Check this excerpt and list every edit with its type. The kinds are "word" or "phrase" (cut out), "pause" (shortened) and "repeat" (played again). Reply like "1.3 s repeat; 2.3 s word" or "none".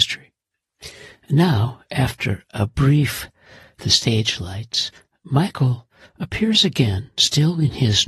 3.8 s phrase